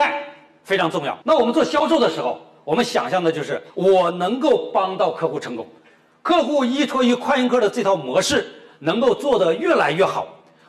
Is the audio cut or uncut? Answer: cut